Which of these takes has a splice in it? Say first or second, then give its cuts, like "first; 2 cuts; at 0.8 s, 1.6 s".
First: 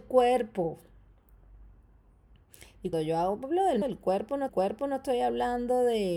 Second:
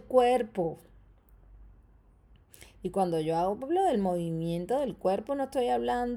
first; 3 cuts; at 2.9 s, 3.8 s, 4.5 s